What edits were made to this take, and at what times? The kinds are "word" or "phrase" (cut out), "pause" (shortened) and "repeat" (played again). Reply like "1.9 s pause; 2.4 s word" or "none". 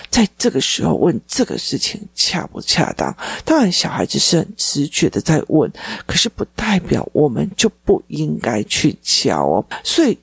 1.3 s pause

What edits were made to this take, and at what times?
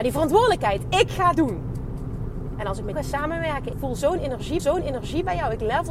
1.3 s word; 2.9 s word; 3.7 s word; 4.6 s repeat

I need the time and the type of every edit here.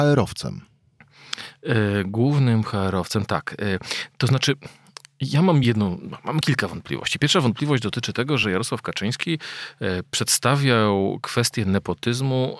none

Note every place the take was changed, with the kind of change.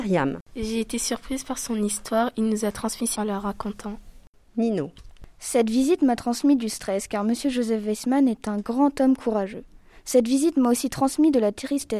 3.1 s word

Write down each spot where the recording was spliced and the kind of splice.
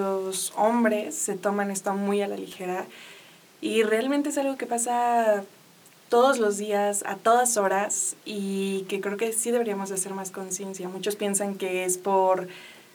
none

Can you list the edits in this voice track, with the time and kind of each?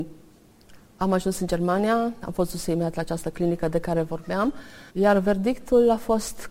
4.9 s pause

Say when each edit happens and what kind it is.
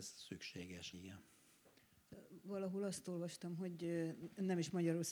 0.9 s word

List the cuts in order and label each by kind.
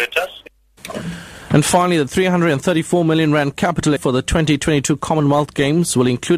4.0 s word

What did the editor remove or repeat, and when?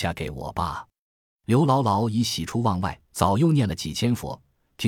3.0 s pause

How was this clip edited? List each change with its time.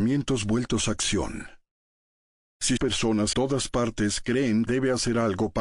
2.8 s word; 3.3 s word; 4.7 s phrase

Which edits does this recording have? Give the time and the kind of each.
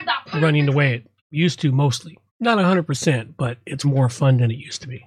1.2 s pause; 2.3 s pause; 3.8 s word

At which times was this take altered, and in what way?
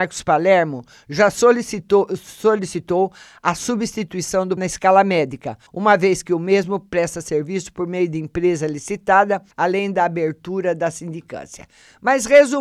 4.6 s word; 5.7 s pause; 9.5 s pause

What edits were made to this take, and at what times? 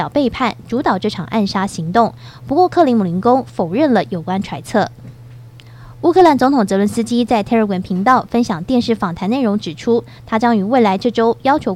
none

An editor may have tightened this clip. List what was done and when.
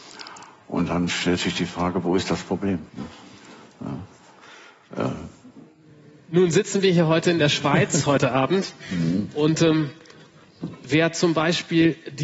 2.9 s pause

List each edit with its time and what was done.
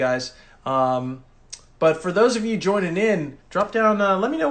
3.4 s pause

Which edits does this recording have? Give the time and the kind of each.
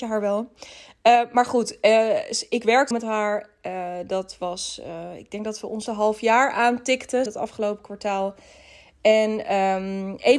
2.9 s word; 5.9 s word; 7.3 s word

